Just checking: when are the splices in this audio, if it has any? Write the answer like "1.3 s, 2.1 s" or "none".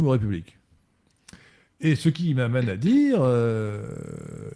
none